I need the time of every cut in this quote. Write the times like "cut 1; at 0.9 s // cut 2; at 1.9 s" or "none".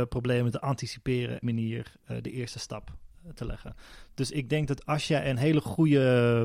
cut 1; at 1.4 s